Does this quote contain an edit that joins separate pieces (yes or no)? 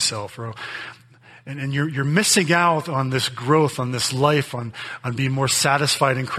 no